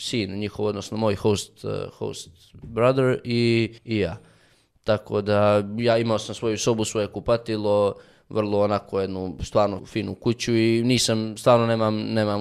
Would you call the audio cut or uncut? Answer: cut